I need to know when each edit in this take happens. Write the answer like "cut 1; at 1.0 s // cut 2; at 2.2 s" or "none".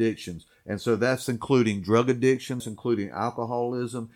cut 1; at 2.6 s